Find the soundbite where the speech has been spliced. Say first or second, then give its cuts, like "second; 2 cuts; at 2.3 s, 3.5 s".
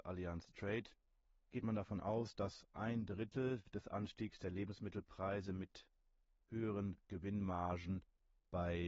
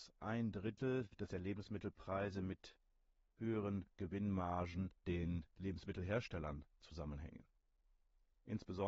second; 2 cuts; at 1.3 s, 5.0 s